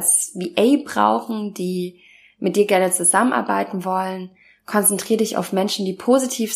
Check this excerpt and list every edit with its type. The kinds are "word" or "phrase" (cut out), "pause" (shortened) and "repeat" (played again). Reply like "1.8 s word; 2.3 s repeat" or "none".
none